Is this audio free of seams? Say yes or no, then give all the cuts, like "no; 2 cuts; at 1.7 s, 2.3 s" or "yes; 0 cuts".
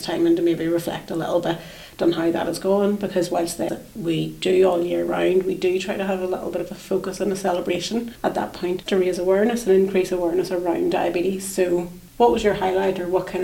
no; 3 cuts; at 3.7 s, 8.9 s, 12.1 s